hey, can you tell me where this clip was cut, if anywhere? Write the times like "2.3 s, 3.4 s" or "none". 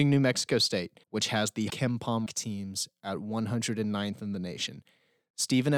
1.0 s, 1.7 s, 2.3 s